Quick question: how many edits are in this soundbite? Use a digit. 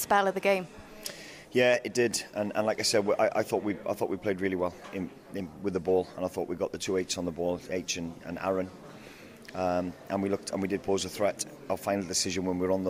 0